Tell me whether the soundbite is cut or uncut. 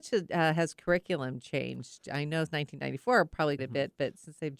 cut